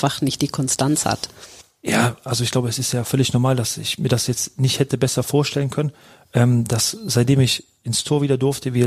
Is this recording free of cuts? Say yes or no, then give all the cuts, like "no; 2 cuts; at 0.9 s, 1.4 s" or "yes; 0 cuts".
yes; 0 cuts